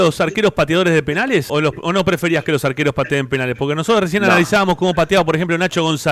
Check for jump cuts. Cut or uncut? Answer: cut